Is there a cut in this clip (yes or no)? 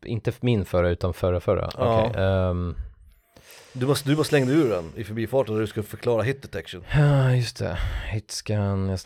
no